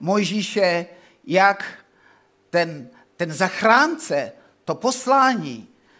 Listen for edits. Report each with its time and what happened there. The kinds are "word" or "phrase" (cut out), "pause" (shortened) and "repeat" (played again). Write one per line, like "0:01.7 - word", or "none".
none